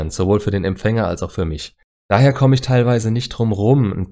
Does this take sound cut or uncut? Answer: uncut